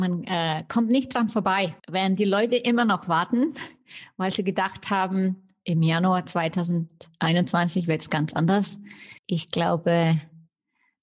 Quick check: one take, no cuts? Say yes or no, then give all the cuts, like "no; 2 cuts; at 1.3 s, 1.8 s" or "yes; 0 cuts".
no; 2 cuts; at 1.8 s, 9.2 s